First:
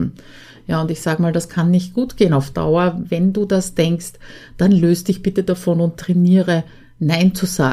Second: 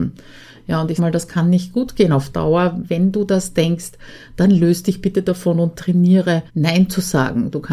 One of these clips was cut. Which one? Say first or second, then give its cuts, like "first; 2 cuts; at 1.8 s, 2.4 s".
second; 2 cuts; at 1.0 s, 6.5 s